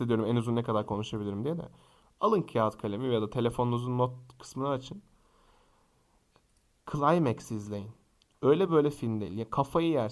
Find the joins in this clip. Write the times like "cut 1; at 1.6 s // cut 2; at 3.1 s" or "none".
none